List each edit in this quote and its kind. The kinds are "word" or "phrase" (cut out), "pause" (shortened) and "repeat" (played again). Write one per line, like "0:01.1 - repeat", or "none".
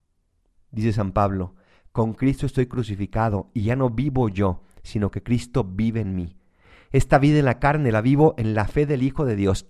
none